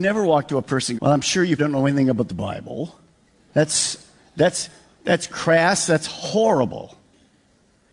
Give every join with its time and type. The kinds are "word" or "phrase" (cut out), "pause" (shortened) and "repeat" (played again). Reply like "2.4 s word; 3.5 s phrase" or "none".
1.0 s phrase; 1.6 s word